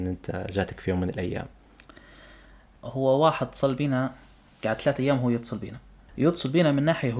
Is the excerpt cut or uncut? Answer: uncut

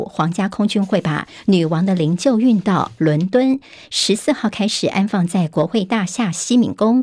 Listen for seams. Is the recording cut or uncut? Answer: uncut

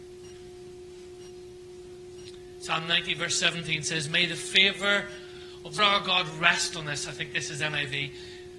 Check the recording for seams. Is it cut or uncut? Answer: cut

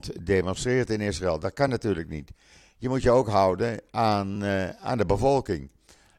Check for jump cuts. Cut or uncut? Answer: uncut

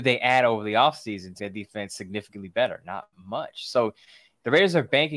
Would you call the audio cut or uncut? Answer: cut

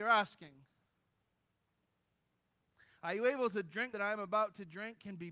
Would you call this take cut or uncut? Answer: cut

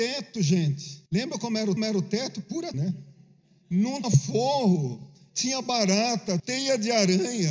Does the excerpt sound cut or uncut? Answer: cut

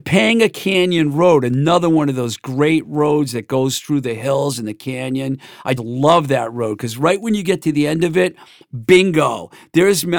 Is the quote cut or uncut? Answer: cut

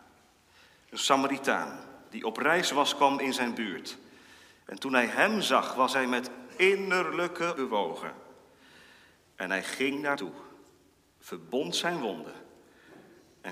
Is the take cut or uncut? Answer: cut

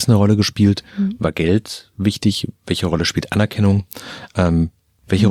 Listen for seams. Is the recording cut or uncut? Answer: uncut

